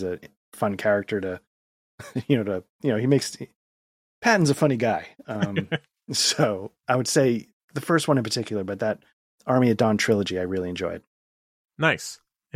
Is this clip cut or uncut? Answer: uncut